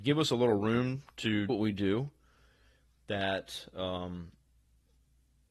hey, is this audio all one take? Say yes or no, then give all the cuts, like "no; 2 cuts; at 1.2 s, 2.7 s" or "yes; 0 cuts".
no; 1 cut; at 1.5 s